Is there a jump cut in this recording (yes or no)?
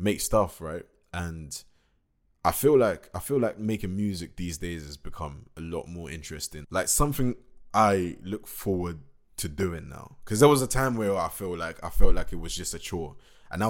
no